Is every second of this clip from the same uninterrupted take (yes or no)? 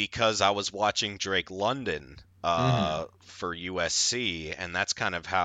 yes